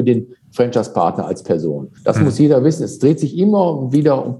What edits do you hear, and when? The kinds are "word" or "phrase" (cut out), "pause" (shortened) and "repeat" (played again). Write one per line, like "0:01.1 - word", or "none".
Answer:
0:02.0 - pause